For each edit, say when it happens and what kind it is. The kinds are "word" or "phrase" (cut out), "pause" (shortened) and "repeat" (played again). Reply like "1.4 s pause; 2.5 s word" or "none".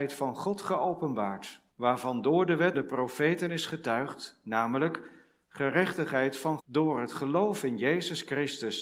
1.7 s pause; 2.7 s word; 6.6 s word

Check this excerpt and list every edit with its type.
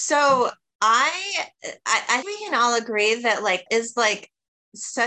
2.2 s word; 3.7 s word

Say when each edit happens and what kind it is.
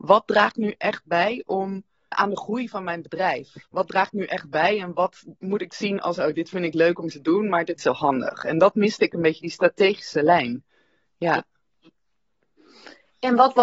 2.1 s word; 3.7 s pause; 7.8 s phrase

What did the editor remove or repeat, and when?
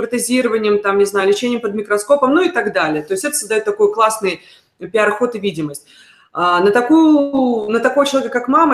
none

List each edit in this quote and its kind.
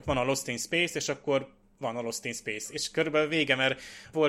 none

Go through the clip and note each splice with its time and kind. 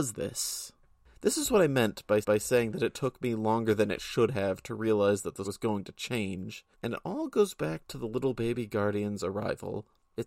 2.2 s repeat; 5.4 s word; 6.7 s pause

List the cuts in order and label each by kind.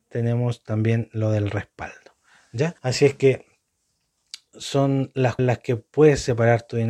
2.8 s pause; 4.5 s word; 5.4 s word

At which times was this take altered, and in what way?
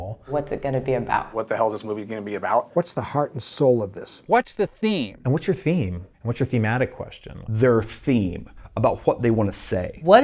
6.1 s pause

